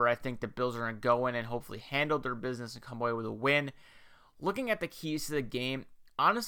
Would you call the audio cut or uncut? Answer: uncut